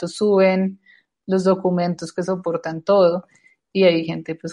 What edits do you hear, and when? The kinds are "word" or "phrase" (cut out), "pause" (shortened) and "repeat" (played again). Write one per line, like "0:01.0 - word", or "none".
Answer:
none